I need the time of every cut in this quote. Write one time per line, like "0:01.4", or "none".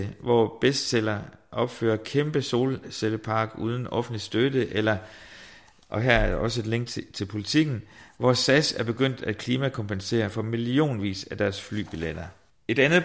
none